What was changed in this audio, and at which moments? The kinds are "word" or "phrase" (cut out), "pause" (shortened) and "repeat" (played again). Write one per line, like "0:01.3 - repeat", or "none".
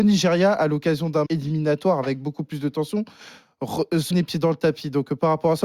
0:01.3 - word
0:04.1 - word